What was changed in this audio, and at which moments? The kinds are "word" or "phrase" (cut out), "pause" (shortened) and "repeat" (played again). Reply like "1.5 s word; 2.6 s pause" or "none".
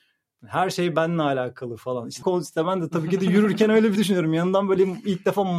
2.2 s phrase; 4.0 s word